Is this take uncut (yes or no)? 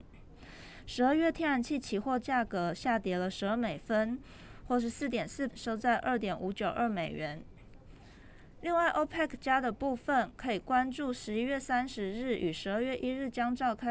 no